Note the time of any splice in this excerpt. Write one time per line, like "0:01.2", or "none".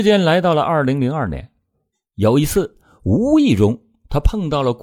none